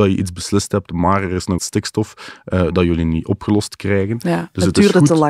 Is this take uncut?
no; 1 cut; at 1.6 s

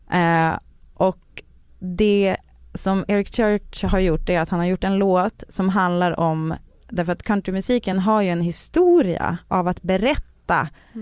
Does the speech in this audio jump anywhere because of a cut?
no; 0 cuts

